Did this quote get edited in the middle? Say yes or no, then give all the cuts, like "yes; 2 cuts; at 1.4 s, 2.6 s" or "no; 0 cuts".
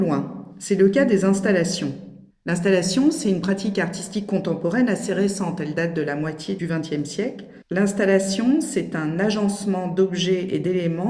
yes; 1 cut; at 7.6 s